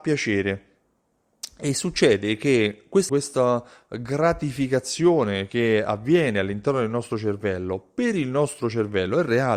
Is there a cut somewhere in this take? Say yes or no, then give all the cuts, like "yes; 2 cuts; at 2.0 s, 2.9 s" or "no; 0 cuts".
yes; 1 cut; at 3.1 s